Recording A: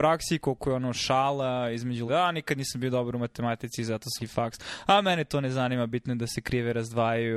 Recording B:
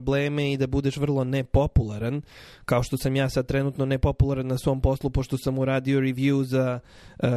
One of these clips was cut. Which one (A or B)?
A